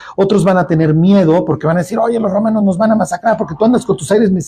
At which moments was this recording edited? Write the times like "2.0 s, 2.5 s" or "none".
none